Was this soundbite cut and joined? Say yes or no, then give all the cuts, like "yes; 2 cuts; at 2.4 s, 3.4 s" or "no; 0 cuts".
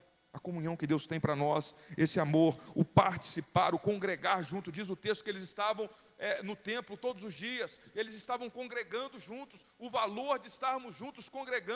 no; 0 cuts